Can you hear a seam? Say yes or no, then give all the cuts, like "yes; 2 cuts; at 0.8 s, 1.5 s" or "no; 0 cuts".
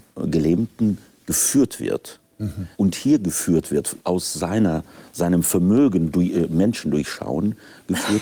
yes; 2 cuts; at 2.7 s, 4.0 s